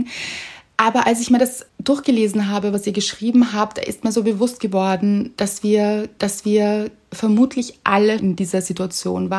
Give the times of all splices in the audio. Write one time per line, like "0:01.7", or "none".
0:01.7
0:06.2
0:08.2